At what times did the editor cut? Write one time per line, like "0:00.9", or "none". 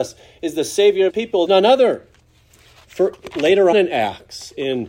0:01.1
0:01.5
0:03.7

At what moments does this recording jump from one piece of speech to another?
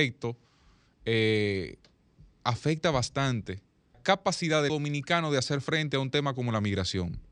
0:03.9
0:04.7

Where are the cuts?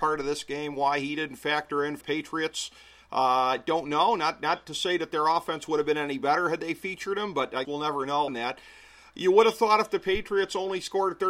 0:02.0
0:07.6
0:08.3

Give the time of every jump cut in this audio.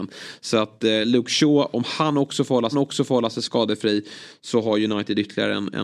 0:02.7

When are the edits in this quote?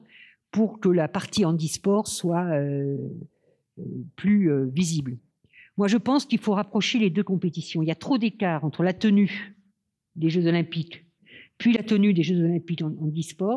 none

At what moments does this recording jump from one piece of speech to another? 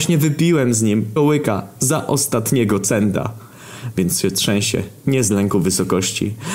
0:01.2

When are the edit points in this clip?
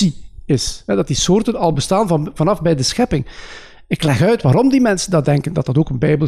none

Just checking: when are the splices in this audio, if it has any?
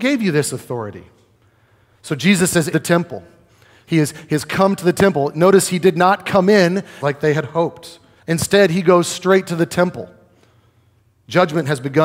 0:02.7
0:07.0
0:08.2

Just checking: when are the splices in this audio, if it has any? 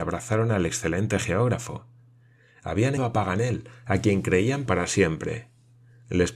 0:03.0
0:04.7

